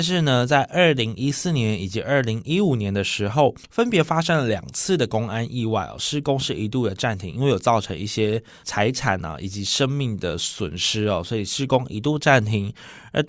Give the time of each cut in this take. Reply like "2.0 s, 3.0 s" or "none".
3.6 s